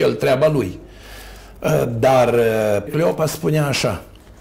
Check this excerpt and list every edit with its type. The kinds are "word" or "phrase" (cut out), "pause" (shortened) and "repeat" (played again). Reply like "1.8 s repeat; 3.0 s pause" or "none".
2.9 s word